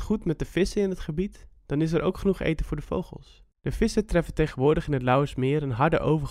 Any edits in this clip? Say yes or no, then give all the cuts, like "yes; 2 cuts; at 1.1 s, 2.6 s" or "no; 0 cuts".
yes; 1 cut; at 3.5 s